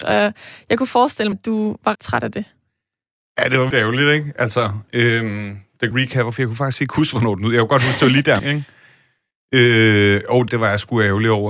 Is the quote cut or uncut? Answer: cut